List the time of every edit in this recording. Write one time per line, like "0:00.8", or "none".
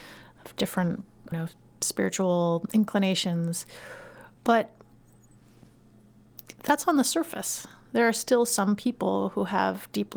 0:01.3
0:04.4

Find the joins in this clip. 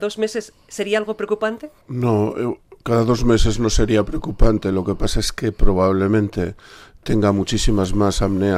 0:01.8

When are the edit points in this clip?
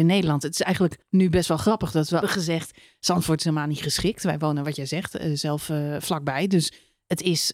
0:01.0
0:02.2

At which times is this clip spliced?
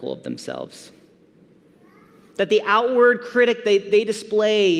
none

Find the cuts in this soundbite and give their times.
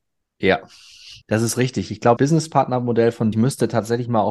0:01.2
0:02.2
0:03.3

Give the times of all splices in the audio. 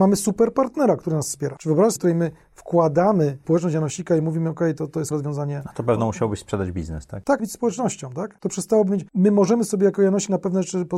0:02.0
0:05.1
0:07.4

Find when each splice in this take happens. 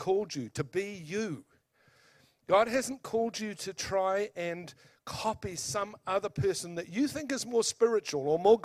none

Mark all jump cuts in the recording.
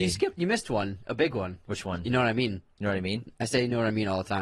0:02.7

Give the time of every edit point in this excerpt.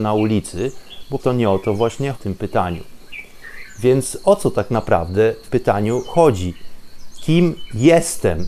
0:01.2
0:02.1
0:05.5

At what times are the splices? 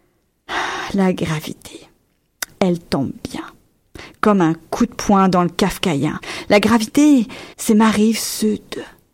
0:07.5

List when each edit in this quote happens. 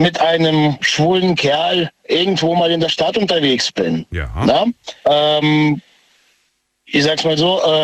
0:05.0

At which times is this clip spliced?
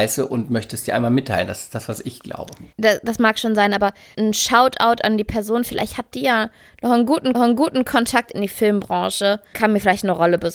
0:02.7
0:04.1
0:07.3
0:09.5

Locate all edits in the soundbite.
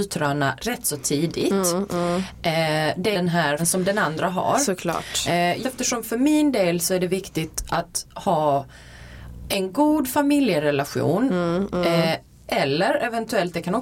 0:03.1
0:03.6
0:05.6

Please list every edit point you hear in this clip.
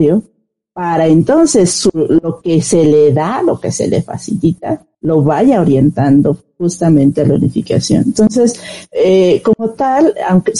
0:04.9

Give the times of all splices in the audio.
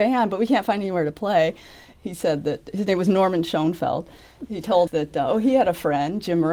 0:04.9

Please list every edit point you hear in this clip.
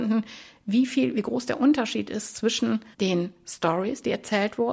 0:02.9

